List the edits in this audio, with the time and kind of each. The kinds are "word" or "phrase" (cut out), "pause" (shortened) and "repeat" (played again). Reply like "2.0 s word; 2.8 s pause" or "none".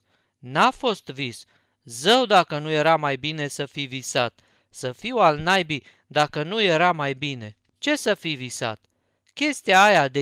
none

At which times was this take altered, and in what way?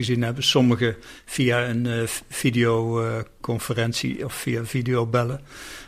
none

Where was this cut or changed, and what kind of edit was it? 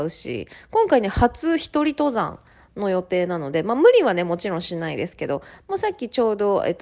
none

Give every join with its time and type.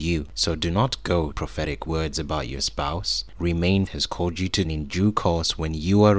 1.3 s word; 1.9 s phrase; 3.9 s phrase; 4.6 s phrase

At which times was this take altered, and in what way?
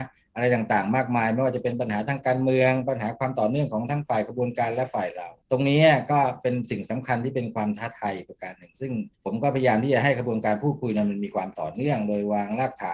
5.4 s pause; 9.1 s pause

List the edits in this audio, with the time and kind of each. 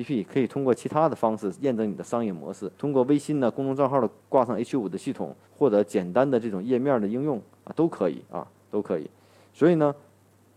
2.7 s pause; 4.2 s pause; 5.4 s pause; 8.2 s pause

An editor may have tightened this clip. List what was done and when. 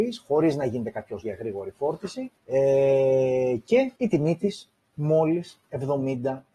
1.2 s word; 2.4 s pause; 4.0 s pause

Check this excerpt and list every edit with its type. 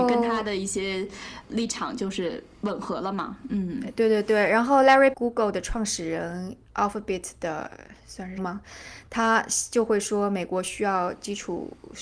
1.5 s word; 5.1 s phrase; 8.0 s pause; 8.4 s word

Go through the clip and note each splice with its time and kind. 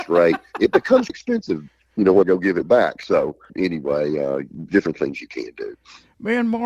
1.1 s word; 2.2 s phrase; 3.5 s word; 4.7 s word

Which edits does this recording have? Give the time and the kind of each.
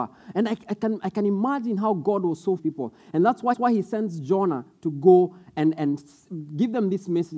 2.6 s phrase; 3.5 s repeat

